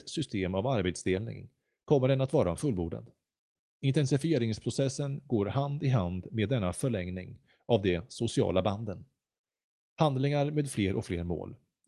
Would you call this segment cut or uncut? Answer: uncut